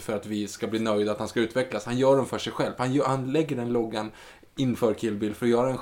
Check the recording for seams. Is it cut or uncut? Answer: uncut